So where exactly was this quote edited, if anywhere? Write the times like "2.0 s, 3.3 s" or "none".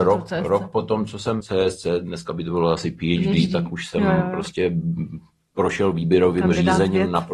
1.4 s